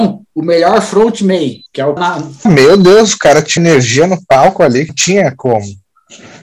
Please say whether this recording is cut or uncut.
cut